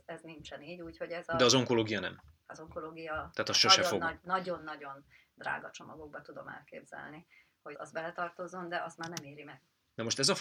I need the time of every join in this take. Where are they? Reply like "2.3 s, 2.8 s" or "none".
7.7 s